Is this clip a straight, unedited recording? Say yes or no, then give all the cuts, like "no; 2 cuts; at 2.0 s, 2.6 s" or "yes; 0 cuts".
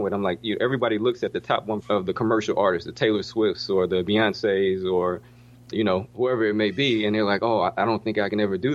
no; 2 cuts; at 1.8 s, 5.7 s